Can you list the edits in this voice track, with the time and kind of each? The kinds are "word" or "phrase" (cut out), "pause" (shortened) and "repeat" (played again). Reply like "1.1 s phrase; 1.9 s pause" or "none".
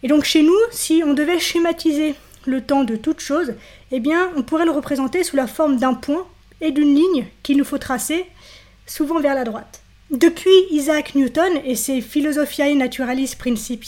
none